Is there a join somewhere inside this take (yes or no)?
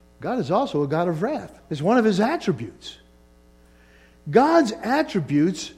yes